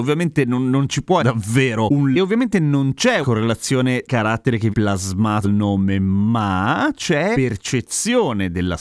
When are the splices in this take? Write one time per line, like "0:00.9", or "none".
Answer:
0:01.2
0:02.1
0:03.2
0:04.1
0:04.7
0:05.4
0:07.3

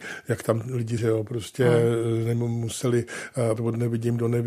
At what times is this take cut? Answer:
0:01.0
0:03.6

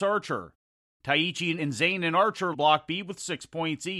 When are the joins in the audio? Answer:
0:01.6
0:02.5

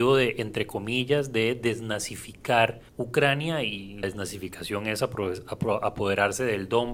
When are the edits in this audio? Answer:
0:02.9
0:04.0

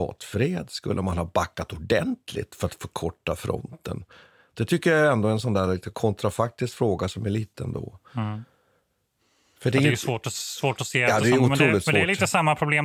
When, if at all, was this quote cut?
0:07.5

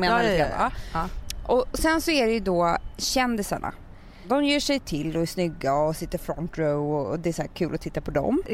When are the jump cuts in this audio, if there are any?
none

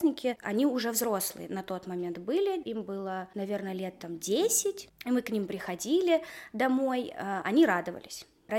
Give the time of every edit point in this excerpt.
0:02.6

